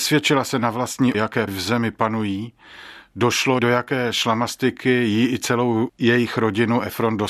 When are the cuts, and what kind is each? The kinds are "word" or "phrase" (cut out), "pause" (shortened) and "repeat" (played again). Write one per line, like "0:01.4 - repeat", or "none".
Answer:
0:01.1 - word
0:01.5 - word
0:03.6 - word